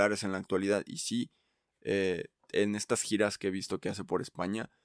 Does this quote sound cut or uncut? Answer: uncut